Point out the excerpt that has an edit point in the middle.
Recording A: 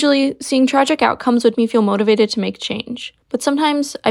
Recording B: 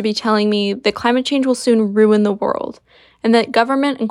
A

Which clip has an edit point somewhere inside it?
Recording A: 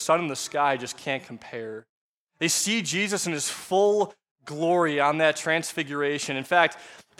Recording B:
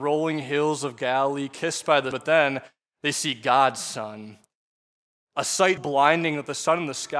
B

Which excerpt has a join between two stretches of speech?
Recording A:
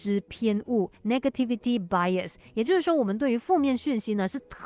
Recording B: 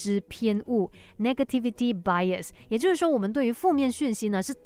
A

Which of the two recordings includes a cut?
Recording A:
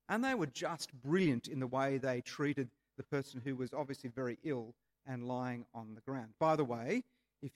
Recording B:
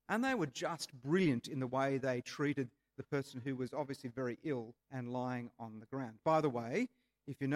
B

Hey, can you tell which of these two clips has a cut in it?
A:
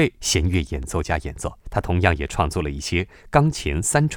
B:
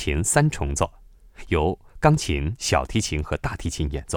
A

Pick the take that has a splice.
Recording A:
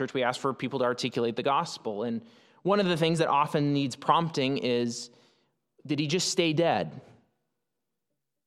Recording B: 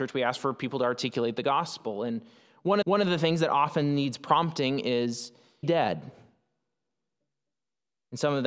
B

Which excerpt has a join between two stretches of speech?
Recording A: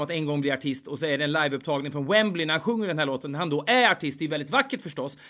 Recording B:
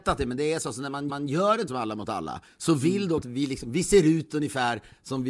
B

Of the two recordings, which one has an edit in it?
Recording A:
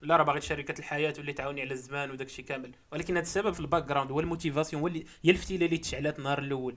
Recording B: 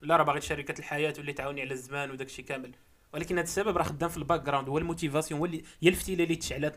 A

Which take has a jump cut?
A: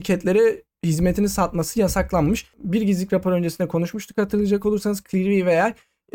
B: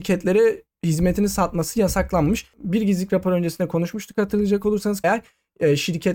B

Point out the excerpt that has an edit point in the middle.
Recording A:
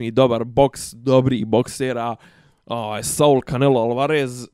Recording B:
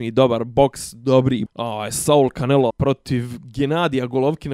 B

